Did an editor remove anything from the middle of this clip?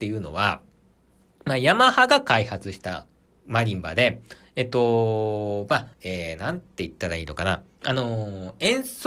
yes; 2 cuts; at 3.2 s, 5.9 s

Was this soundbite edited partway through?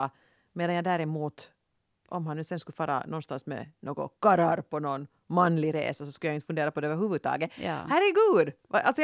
no; 0 cuts

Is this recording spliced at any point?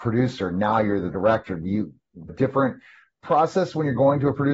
yes; 2 cuts; at 2.3 s, 3.2 s

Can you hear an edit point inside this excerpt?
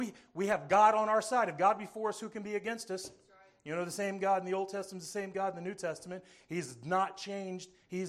no; 0 cuts

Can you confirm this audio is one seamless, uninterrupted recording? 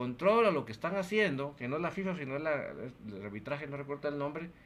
yes; 0 cuts

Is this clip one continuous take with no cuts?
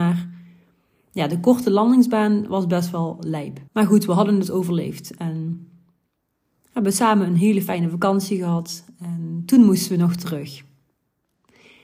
no; 1 cut; at 3.7 s

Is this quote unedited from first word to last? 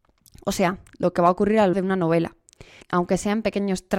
no; 2 cuts; at 1.7 s, 2.8 s

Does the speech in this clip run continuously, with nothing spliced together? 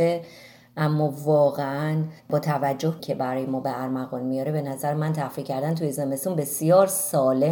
no; 2 cuts; at 2.2 s, 3.0 s

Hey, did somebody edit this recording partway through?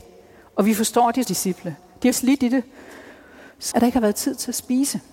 yes; 3 cuts; at 1.2 s, 2.1 s, 3.7 s

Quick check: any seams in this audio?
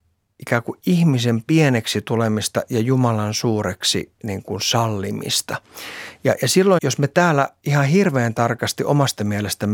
yes; 1 cut; at 6.8 s

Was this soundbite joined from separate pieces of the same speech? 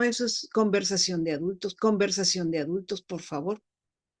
yes; 1 cut; at 1.8 s

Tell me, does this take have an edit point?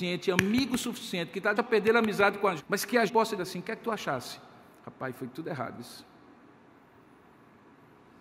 yes; 4 cuts; at 1.6 s, 2.6 s, 3.1 s, 3.4 s

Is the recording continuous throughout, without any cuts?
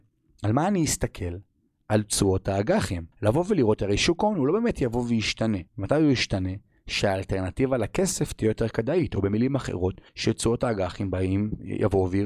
no; 3 cuts; at 3.1 s, 5.7 s, 10.1 s

